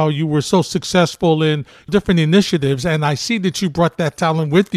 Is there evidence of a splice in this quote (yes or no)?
yes